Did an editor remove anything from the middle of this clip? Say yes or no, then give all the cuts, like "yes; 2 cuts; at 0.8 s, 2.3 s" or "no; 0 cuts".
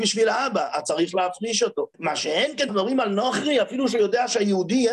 yes; 2 cuts; at 1.9 s, 2.7 s